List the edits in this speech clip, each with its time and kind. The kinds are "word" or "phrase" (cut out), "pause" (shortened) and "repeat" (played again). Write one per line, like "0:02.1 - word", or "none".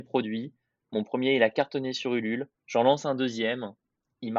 0:02.6 - pause